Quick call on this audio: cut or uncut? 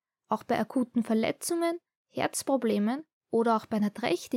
uncut